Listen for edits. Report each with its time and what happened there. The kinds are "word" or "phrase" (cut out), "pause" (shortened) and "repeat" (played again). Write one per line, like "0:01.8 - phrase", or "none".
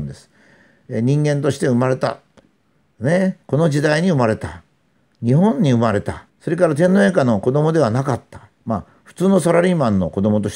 0:03.4 - pause
0:06.3 - pause